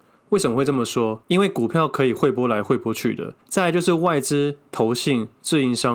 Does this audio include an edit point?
yes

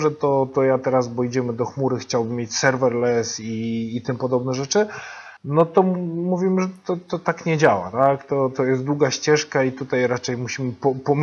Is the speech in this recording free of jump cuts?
no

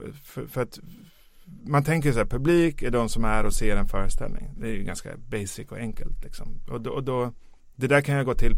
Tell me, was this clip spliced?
no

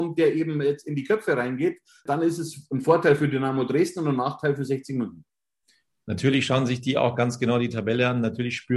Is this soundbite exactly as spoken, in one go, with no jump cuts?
yes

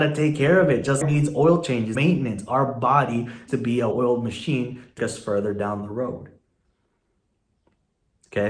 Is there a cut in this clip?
yes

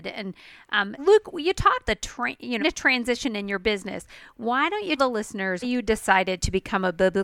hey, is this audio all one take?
no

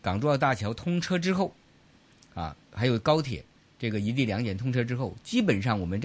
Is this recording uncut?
yes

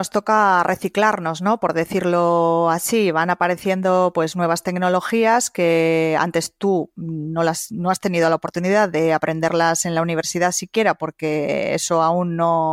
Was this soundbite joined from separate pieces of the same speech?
no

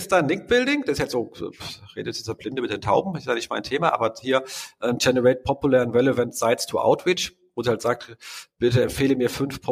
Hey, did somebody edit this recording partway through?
no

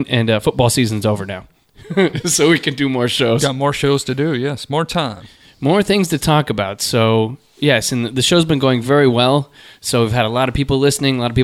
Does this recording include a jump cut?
no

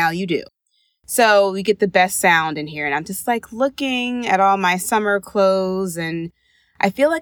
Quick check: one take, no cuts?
yes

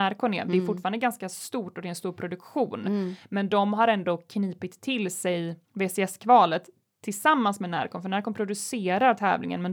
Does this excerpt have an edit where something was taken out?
yes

